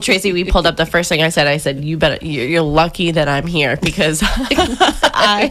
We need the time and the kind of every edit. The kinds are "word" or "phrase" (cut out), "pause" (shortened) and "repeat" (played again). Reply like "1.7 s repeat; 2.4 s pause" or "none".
none